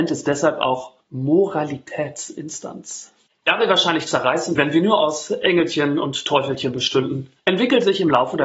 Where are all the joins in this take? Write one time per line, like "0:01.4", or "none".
0:01.0
0:04.5
0:07.4

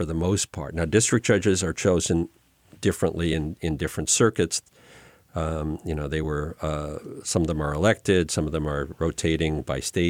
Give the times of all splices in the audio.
none

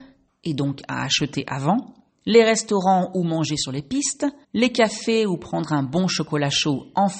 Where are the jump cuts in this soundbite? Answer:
0:02.1
0:04.4

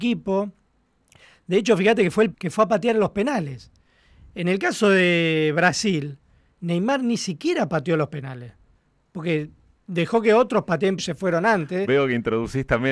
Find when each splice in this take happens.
0:02.3
0:11.0

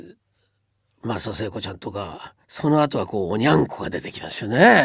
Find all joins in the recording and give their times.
0:02.4

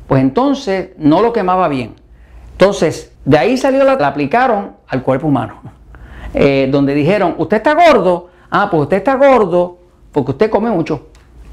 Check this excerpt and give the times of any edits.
0:03.2
0:04.0

